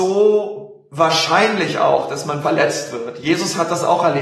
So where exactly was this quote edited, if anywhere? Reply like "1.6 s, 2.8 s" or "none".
2.4 s